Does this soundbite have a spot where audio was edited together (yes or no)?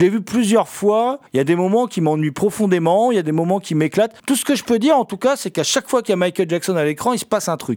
yes